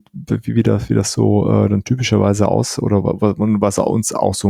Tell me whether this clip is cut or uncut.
uncut